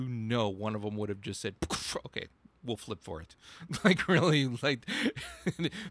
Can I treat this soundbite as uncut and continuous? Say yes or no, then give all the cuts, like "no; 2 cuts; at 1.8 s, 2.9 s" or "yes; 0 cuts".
yes; 0 cuts